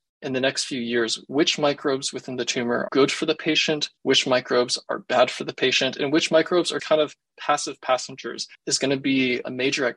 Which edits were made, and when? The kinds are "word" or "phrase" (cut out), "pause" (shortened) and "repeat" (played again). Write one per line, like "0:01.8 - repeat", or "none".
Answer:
0:02.9 - word
0:04.0 - pause
0:06.8 - word
0:08.5 - pause